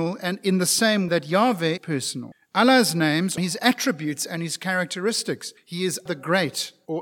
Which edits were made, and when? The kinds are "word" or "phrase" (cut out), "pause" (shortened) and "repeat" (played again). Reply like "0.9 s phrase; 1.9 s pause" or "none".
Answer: 1.1 s word; 1.8 s word; 3.4 s word; 6.1 s word